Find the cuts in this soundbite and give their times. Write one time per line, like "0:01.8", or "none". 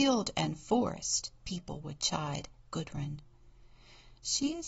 none